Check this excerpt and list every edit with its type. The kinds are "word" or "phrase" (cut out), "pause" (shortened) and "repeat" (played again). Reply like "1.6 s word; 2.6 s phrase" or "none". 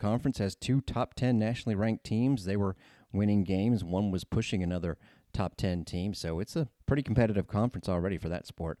none